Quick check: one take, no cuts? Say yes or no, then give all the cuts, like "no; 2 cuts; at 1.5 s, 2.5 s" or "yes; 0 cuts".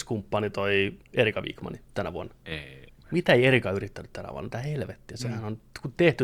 no; 1 cut; at 1.0 s